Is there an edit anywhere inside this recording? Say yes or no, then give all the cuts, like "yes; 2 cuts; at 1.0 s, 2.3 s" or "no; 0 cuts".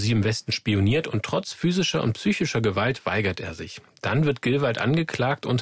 no; 0 cuts